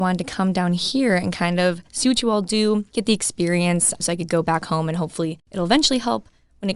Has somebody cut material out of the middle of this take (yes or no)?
no